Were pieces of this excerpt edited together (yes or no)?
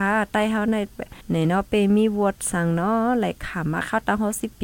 yes